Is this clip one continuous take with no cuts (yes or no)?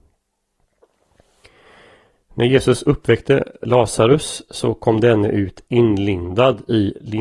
yes